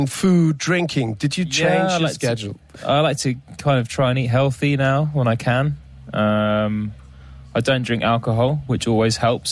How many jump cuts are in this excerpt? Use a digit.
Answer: 0